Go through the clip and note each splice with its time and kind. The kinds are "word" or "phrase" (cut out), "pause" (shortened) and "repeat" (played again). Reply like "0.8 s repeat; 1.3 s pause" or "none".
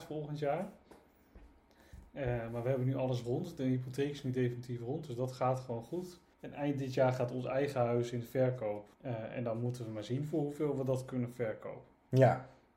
6.3 s pause; 8.9 s pause

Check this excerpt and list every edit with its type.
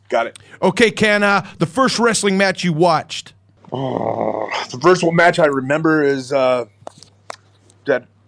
none

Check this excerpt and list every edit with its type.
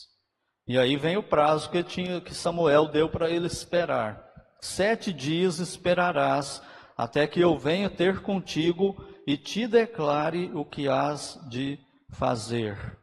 none

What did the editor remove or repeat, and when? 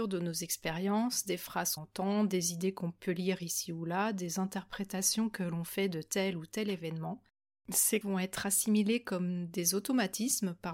1.8 s word; 8.0 s word

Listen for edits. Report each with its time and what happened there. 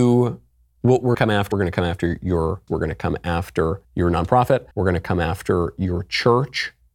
1.1 s phrase; 1.5 s phrase; 2.7 s word; 3.8 s pause; 4.7 s pause

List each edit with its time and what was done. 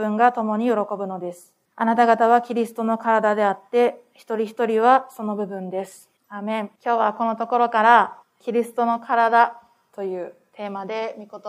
1.6 s pause; 6.2 s pause; 6.8 s pause; 8.2 s pause

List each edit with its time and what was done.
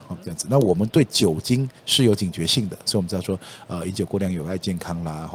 1.8 s pause

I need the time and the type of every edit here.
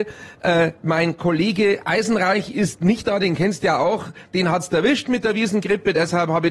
none

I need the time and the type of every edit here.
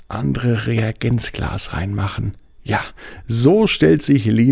none

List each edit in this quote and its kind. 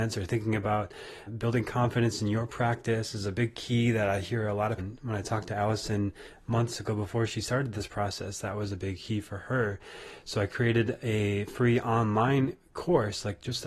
1.3 s word; 4.8 s word

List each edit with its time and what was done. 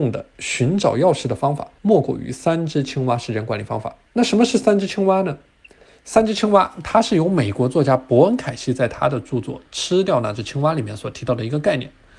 1.8 s pause; 4.0 s pause

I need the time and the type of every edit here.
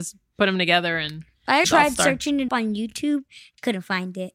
1.6 s word; 2.5 s word

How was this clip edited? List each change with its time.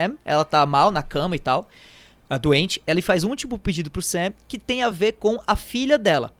none

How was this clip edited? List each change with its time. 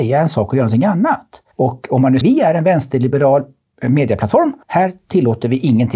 1.5 s pause; 2.2 s word; 4.6 s pause

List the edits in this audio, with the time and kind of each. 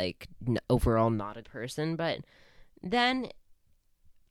1.4 s word

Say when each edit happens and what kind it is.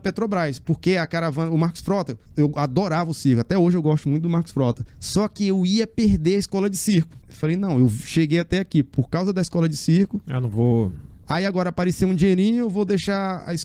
2.3 s pause; 4.9 s pause; 7.2 s pause

